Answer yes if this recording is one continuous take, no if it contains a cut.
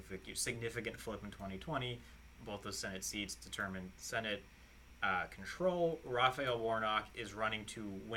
yes